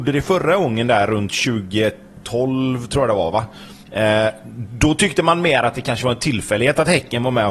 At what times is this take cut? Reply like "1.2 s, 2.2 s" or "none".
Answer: 3.8 s